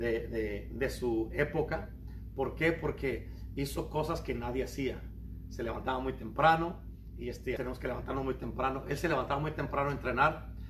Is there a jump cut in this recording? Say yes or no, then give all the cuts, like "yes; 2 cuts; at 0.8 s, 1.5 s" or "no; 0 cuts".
yes; 1 cut; at 7.6 s